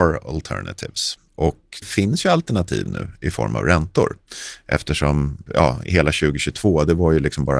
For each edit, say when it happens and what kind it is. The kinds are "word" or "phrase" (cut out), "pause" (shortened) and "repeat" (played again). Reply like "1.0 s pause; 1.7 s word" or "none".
1.8 s word; 5.5 s word